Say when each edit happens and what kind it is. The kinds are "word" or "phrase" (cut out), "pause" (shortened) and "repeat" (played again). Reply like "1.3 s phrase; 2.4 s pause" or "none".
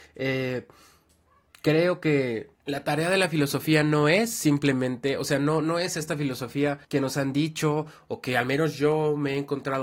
2.6 s pause; 6.8 s pause

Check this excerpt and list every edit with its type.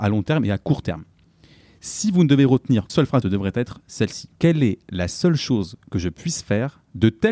2.9 s word; 3.2 s phrase; 4.4 s pause

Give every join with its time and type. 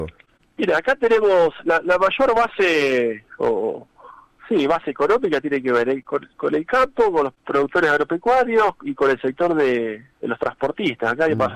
3.3 s pause

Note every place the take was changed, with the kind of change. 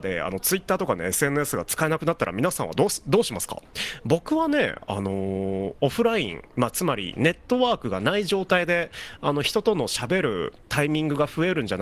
none

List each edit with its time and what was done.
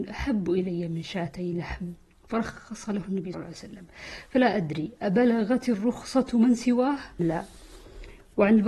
3.3 s word; 7.2 s word

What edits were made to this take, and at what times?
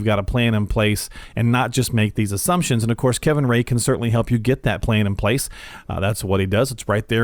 none

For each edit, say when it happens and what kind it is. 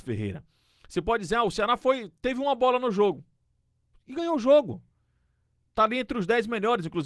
none

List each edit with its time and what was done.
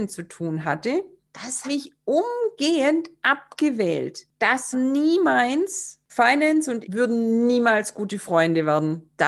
1.6 s word; 4.7 s word; 6.1 s word; 6.8 s word

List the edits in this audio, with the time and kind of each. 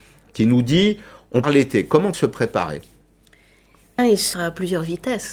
1.4 s word; 2.1 s word; 4.0 s word; 4.3 s word

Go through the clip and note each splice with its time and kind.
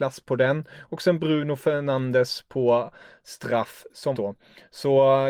4.1 s word

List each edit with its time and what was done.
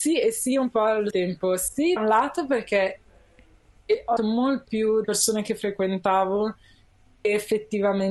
1.1 s word; 2.0 s word; 4.2 s word; 4.7 s word; 5.0 s word

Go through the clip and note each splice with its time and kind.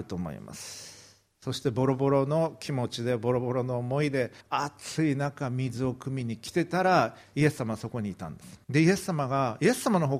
4.4 s pause; 8.6 s pause

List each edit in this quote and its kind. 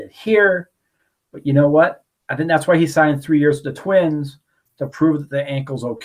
none

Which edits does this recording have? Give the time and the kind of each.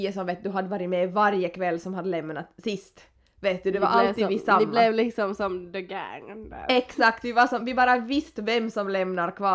none

